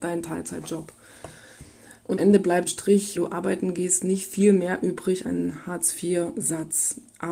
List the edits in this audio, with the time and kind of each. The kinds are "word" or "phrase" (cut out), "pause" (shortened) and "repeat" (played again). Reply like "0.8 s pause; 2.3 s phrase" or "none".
2.2 s word; 2.6 s word; 3.1 s word; 5.2 s word